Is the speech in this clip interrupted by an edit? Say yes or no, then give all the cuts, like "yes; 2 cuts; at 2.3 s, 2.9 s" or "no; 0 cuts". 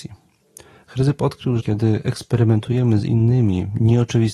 yes; 1 cut; at 1.6 s